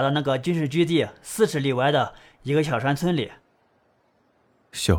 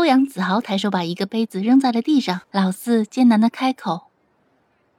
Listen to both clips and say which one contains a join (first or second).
second